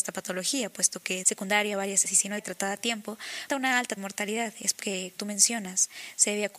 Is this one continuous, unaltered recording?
no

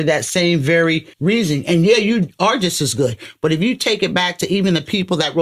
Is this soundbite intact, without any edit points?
no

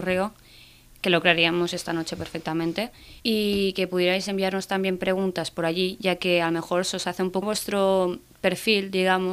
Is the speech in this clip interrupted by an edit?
yes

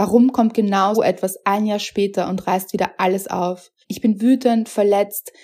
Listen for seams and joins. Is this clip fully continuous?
no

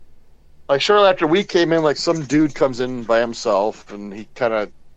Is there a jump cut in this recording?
no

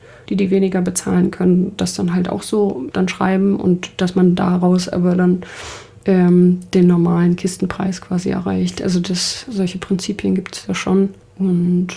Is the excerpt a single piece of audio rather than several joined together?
yes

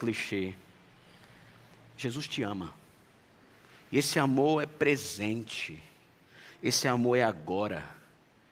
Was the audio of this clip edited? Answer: yes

